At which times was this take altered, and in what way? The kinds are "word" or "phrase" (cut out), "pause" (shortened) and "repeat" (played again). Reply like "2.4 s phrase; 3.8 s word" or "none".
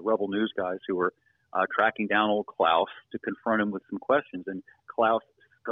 none